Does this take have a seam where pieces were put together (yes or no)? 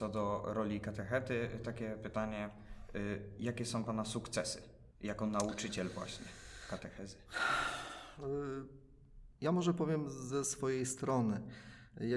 yes